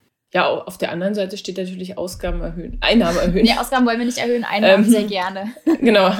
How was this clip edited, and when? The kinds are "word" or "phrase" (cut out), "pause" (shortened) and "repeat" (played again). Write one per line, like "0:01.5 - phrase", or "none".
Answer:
0:02.8 - word